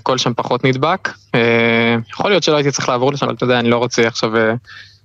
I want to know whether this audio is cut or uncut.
cut